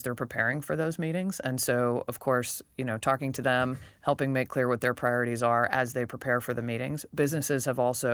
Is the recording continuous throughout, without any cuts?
yes; 0 cuts

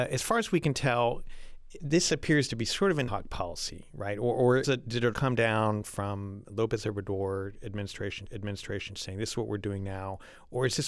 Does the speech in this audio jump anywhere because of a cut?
yes; 5 cuts; at 1.8 s, 3.1 s, 4.6 s, 5.1 s, 8.3 s

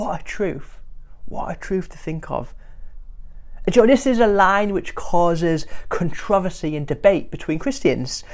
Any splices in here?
no; 0 cuts

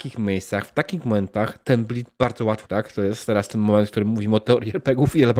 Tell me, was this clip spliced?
yes; 1 cut; at 2.6 s

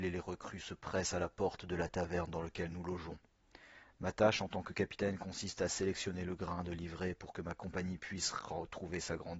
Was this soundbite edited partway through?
no; 0 cuts

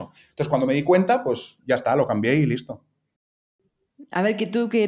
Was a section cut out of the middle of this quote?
no; 0 cuts

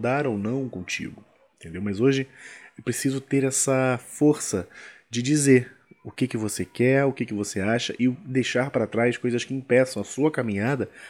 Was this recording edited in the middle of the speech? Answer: no; 0 cuts

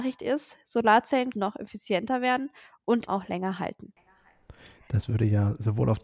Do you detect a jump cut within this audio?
yes; 2 cuts; at 1.3 s, 3.1 s

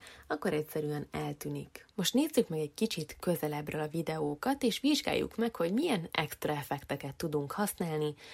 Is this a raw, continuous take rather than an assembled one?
no; 1 cut; at 1.9 s

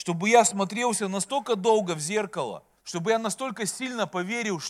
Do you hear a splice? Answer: yes; 1 cut; at 2.8 s

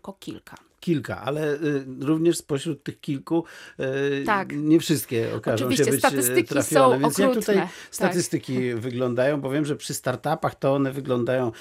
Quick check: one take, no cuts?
yes; 0 cuts

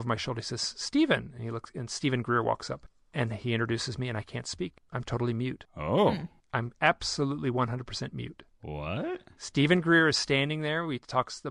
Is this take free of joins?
yes; 0 cuts

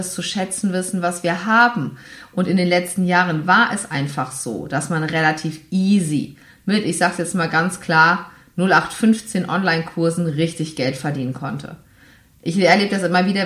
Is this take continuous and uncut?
yes; 0 cuts

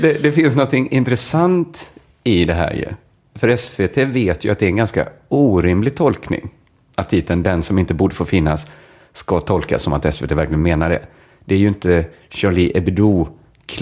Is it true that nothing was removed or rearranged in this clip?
yes; 0 cuts

